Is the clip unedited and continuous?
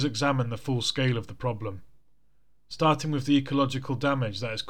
yes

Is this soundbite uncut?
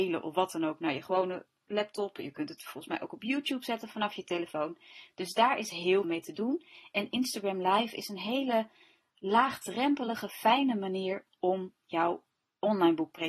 no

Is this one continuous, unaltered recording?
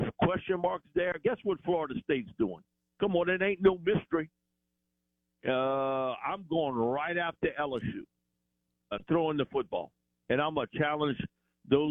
yes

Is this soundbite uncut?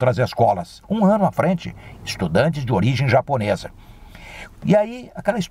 no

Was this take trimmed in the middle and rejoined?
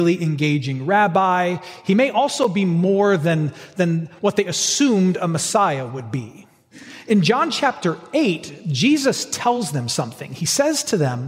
no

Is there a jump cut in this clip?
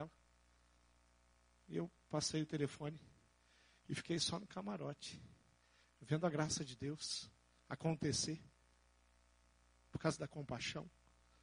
no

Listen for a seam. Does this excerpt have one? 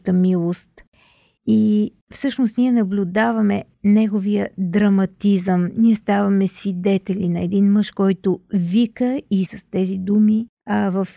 yes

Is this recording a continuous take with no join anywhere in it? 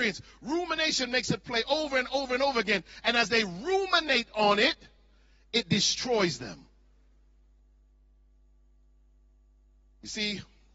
yes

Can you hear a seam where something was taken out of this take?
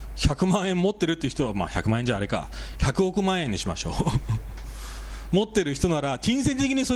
no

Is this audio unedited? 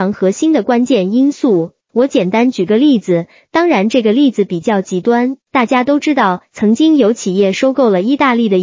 no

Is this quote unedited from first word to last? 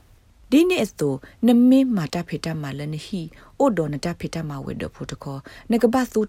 yes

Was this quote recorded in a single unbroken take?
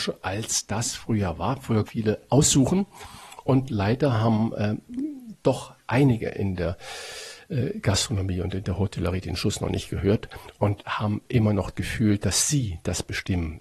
no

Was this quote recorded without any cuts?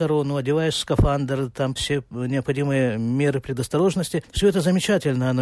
no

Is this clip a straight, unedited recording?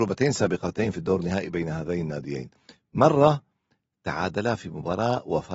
yes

